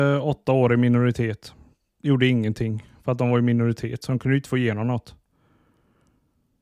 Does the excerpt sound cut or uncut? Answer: uncut